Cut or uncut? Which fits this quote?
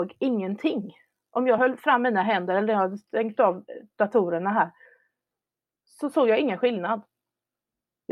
uncut